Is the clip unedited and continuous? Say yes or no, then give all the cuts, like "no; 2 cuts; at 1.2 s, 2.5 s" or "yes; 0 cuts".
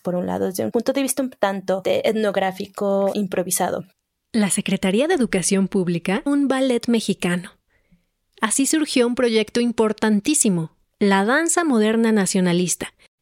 no; 1 cut; at 6.3 s